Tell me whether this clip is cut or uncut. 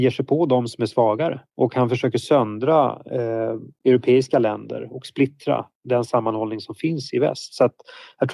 uncut